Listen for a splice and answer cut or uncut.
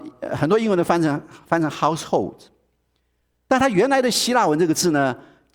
uncut